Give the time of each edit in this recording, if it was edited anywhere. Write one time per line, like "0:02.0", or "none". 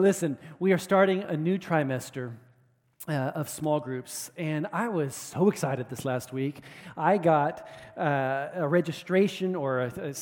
none